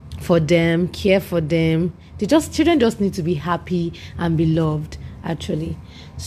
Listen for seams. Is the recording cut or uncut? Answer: uncut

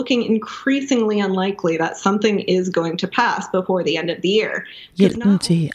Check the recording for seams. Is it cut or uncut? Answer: uncut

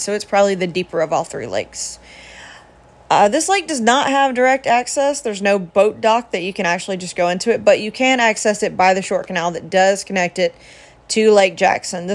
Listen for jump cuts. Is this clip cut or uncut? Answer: uncut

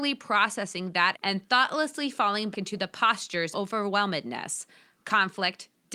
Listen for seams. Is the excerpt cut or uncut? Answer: cut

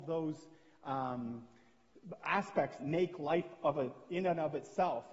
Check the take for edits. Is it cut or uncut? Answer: cut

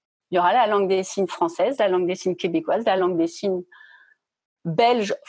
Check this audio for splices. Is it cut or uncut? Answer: uncut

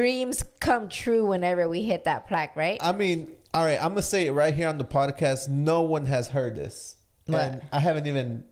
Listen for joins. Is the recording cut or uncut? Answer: uncut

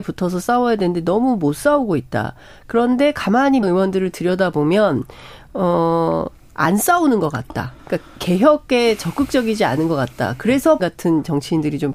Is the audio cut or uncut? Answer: cut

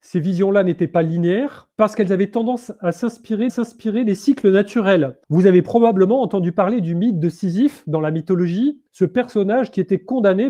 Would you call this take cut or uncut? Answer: cut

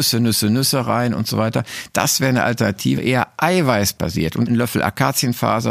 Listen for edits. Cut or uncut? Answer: cut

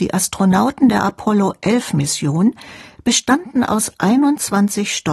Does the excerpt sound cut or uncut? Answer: uncut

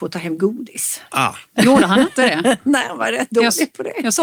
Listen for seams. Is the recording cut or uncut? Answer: cut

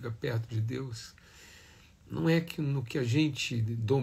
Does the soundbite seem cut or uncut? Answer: uncut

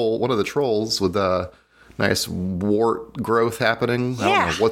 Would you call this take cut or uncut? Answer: uncut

